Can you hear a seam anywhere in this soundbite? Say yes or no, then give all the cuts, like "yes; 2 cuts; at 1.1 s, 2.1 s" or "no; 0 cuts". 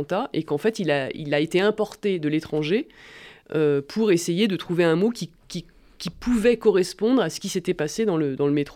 no; 0 cuts